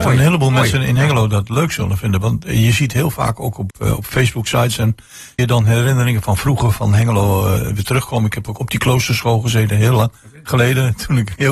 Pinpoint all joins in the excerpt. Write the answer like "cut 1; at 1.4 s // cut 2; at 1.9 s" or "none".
cut 1; at 3.7 s // cut 2; at 5.4 s // cut 3; at 7.6 s // cut 4; at 8.6 s